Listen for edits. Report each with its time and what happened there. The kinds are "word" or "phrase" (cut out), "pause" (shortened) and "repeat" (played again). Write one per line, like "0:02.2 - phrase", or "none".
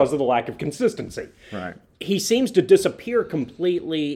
none